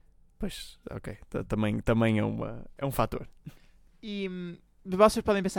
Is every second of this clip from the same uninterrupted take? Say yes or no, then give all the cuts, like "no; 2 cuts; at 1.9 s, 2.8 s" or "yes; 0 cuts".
yes; 0 cuts